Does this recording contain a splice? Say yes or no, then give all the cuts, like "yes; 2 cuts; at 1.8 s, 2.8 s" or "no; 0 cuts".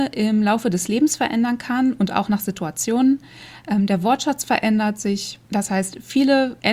no; 0 cuts